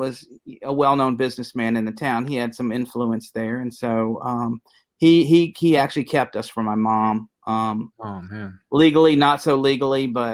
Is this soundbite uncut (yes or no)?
yes